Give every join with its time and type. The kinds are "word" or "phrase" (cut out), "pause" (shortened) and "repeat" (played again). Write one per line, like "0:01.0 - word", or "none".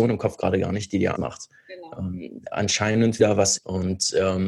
0:01.1 - word
0:03.2 - word
0:03.6 - phrase